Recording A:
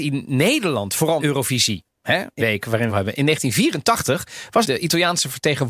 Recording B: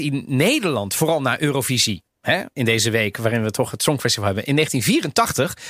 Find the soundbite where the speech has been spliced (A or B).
A